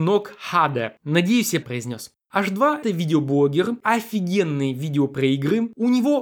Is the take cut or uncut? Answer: cut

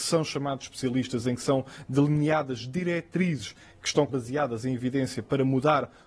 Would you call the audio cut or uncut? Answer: cut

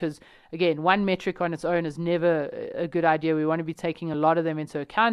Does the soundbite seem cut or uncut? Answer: uncut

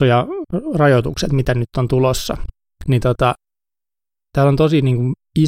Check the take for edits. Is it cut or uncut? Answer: uncut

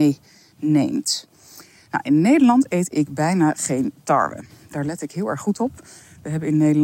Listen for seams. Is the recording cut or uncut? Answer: uncut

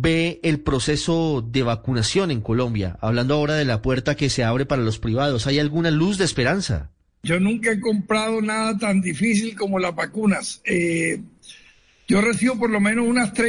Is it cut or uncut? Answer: uncut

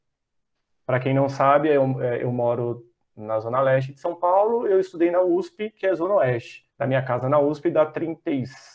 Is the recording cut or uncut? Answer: cut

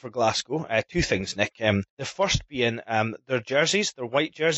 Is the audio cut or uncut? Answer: cut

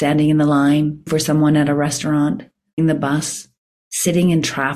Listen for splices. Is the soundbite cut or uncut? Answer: cut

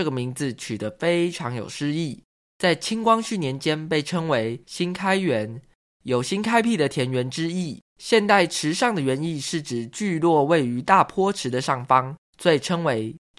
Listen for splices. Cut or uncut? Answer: cut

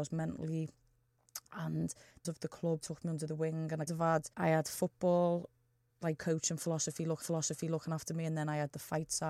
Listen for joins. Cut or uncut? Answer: cut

